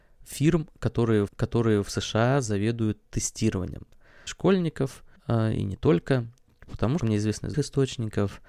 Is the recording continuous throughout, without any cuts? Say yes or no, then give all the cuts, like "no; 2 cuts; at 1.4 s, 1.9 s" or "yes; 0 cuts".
no; 5 cuts; at 1.3 s, 4.3 s, 5.2 s, 7.0 s, 7.5 s